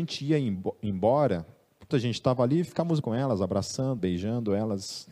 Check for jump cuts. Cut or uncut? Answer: cut